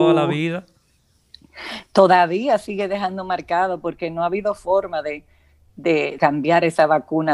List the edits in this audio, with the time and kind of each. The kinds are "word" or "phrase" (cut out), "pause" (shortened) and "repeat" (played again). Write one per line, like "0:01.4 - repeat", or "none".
0:06.2 - word